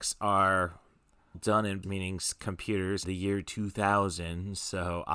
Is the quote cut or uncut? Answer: cut